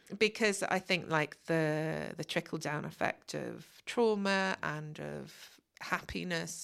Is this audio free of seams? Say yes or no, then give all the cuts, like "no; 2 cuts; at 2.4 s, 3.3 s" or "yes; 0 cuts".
yes; 0 cuts